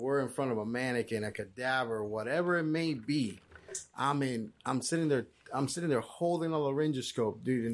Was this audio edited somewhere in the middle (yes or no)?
no